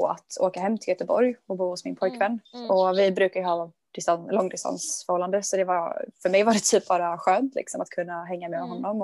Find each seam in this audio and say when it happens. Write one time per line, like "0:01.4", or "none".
0:02.4